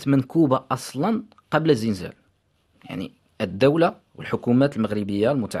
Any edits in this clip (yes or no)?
no